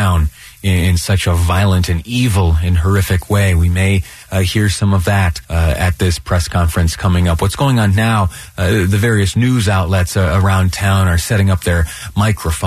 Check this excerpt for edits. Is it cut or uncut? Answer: cut